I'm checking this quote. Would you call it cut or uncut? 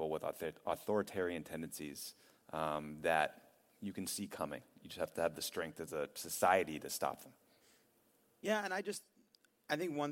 uncut